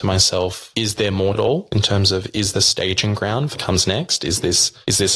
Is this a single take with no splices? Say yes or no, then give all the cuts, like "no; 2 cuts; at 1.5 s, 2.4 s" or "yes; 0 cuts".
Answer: no; 3 cuts; at 1.3 s, 2.5 s, 3.5 s